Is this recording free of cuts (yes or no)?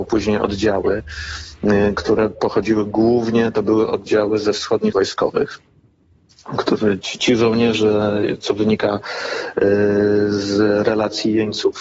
no